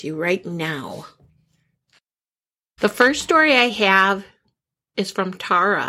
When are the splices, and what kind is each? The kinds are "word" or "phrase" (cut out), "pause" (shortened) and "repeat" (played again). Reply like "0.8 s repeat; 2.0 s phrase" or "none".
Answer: none